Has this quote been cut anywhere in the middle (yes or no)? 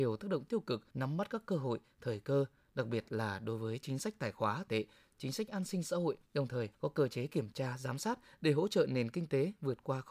yes